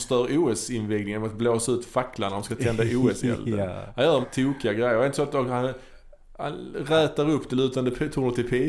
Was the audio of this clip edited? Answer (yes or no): yes